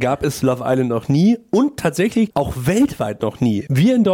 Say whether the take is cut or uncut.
uncut